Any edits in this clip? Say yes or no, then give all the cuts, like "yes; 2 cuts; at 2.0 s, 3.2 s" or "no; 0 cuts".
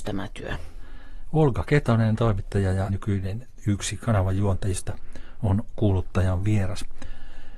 yes; 1 cut; at 2.9 s